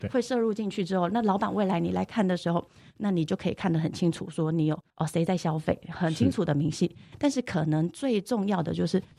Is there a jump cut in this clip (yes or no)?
no